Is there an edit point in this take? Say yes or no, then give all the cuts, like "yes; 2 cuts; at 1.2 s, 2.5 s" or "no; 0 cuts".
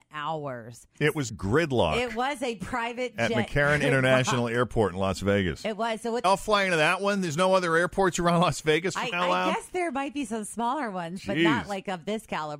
yes; 4 cuts; at 0.9 s, 1.3 s, 6.2 s, 9.1 s